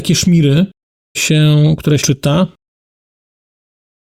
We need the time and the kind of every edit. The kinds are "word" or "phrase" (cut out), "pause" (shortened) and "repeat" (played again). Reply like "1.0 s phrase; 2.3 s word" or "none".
1.1 s word; 2.0 s word

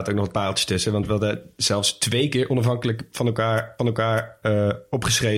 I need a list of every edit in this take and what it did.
3.8 s repeat

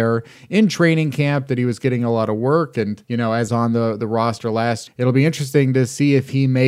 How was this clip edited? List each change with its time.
3.0 s pause; 3.5 s phrase; 4.9 s word

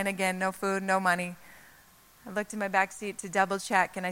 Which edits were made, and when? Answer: none

